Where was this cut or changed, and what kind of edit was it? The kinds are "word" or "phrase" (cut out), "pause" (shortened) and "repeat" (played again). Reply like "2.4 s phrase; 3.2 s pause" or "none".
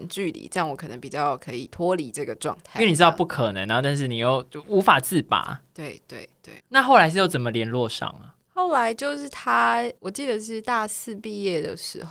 6.6 s pause; 10.0 s pause